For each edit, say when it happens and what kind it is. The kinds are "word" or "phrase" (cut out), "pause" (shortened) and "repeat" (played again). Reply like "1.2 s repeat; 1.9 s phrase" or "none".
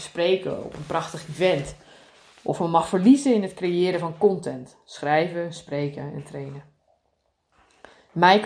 none